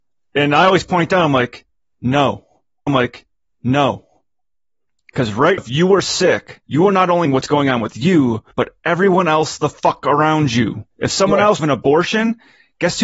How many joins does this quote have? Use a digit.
7